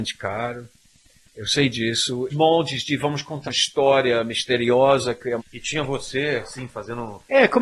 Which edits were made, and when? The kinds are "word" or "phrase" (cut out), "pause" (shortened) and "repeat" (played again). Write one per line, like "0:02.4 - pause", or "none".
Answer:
0:02.3 - phrase
0:03.5 - word
0:05.4 - word